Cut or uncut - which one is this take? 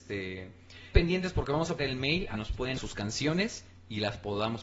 cut